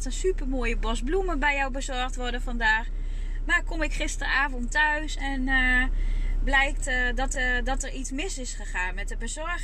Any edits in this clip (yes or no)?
yes